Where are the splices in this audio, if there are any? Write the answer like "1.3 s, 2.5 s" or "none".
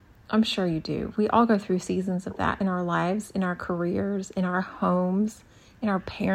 none

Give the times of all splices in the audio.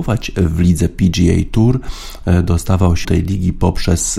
3.0 s

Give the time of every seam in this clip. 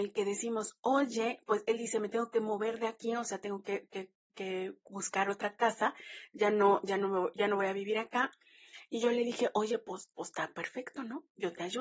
4.9 s, 10.1 s

